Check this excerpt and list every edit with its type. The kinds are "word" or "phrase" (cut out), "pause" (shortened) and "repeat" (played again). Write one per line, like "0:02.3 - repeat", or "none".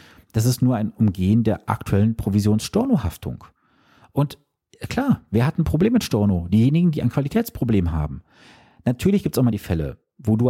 none

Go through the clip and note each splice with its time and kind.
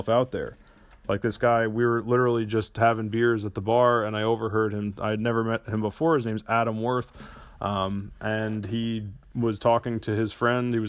none

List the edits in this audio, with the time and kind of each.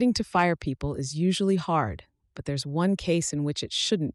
none

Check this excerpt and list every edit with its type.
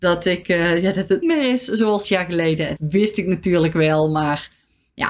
0:01.2 - word
0:02.0 - word
0:02.8 - word

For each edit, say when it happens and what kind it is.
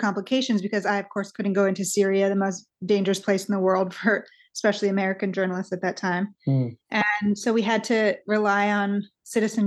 none

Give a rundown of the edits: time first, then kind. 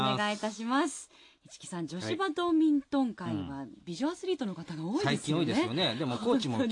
none

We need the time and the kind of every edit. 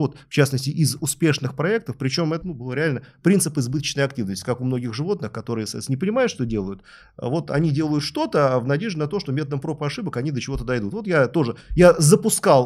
0:02.4 - word

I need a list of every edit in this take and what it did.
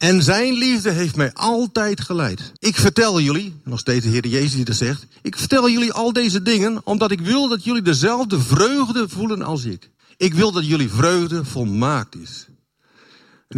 0:02.6 - pause
0:10.0 - pause

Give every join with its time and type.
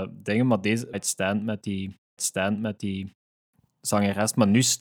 0:00.9 - phrase
0:02.2 - repeat

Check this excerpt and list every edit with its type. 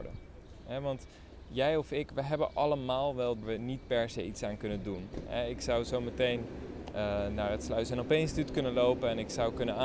0:03.4 - phrase

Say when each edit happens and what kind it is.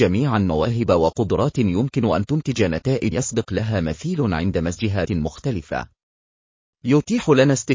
0:03.1 - word
0:05.1 - word

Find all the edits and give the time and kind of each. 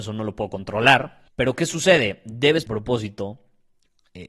0:01.3 - pause
0:02.7 - phrase

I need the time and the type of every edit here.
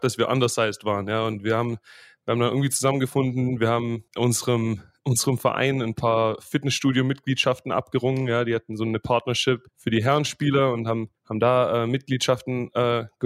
0:04.1 - pause
0:09.7 - pause
0:11.2 - pause

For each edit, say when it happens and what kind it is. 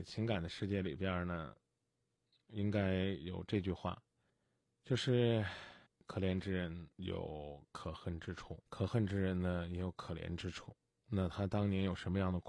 0:04.3 - pause
0:05.9 - pause
0:06.9 - pause
0:08.6 - pause

